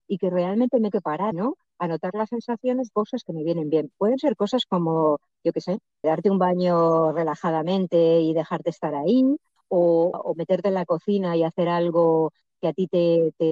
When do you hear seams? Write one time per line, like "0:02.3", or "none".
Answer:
0:00.9
0:01.3
0:02.9
0:06.0
0:10.1